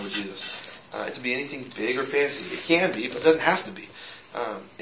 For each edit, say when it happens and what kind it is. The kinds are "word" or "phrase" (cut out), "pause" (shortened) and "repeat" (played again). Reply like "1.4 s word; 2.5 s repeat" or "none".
1.1 s phrase